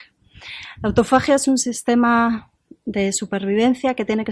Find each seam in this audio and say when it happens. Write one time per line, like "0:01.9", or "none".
none